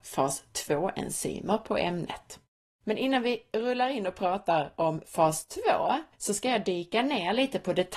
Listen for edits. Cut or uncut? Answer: cut